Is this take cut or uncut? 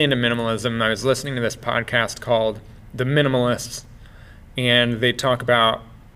uncut